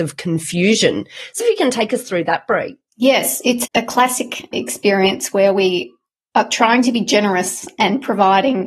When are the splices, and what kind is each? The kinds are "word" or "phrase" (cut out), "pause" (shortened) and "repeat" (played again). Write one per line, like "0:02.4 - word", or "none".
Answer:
0:01.4 - word
0:03.6 - word
0:04.5 - word